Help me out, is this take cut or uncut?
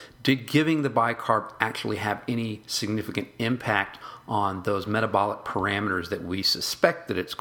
uncut